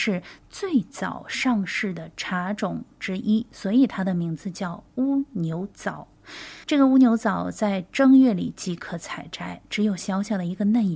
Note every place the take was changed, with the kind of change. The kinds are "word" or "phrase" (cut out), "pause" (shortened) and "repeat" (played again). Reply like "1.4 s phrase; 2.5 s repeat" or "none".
6.6 s pause

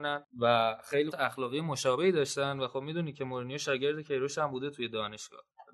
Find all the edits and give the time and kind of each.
1.1 s word

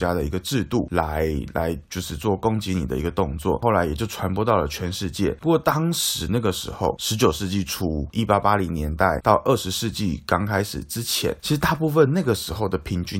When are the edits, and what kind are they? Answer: 8.1 s word

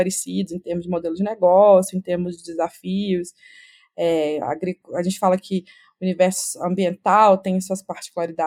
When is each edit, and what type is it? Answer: none

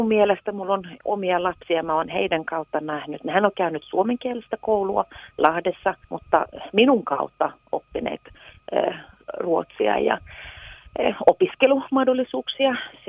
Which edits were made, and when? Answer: 6.0 s pause

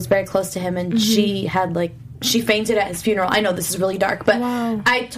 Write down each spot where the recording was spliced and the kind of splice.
none

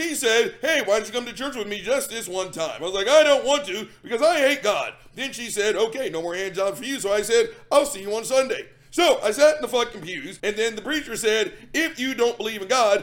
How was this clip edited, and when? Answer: 10.4 s pause

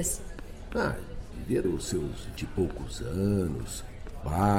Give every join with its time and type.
1.6 s word; 2.4 s word

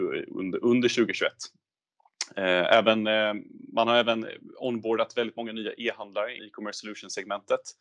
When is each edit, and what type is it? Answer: 6.4 s word

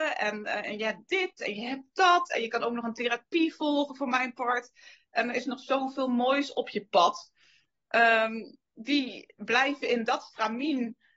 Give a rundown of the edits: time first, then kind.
none

